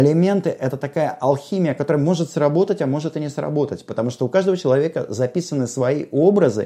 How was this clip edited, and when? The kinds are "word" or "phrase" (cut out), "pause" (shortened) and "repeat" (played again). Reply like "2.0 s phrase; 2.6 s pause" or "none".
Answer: none